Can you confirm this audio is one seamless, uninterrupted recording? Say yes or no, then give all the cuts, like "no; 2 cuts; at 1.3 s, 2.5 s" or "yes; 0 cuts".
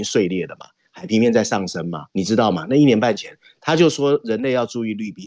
no; 1 cut; at 2.1 s